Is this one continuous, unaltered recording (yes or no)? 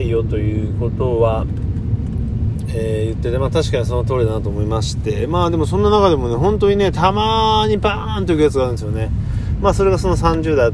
yes